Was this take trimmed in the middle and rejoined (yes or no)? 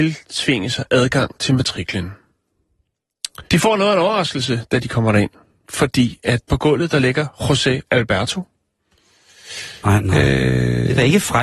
yes